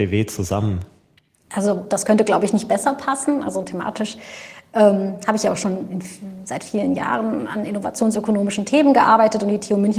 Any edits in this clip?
no; 0 cuts

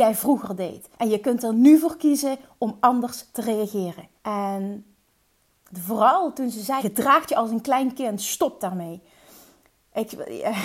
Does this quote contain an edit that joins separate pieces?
yes; 3 cuts; at 0.9 s, 4.2 s, 6.8 s

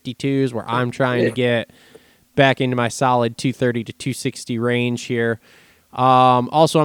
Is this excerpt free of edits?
yes; 0 cuts

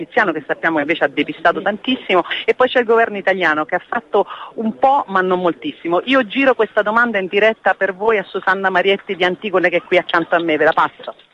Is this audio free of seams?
yes; 0 cuts

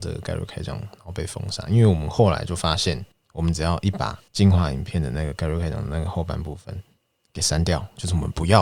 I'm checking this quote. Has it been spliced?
yes; 3 cuts; at 3.1 s, 4.3 s, 7.0 s

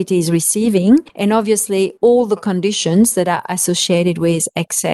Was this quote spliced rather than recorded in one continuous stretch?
no; 0 cuts

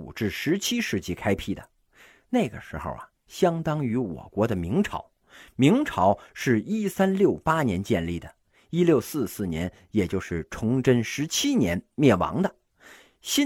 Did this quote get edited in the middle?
no; 0 cuts

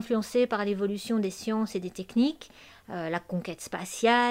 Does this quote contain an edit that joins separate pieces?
no; 0 cuts

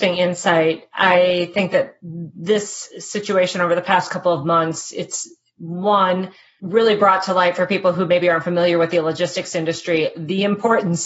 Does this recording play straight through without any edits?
yes; 0 cuts

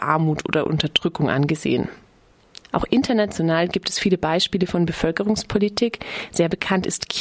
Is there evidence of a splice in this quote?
yes; 1 cut; at 2.6 s

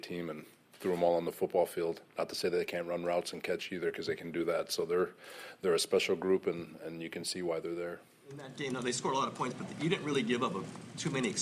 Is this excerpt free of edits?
yes; 0 cuts

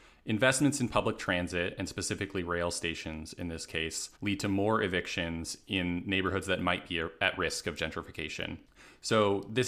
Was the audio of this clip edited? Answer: yes; 1 cut; at 4.2 s

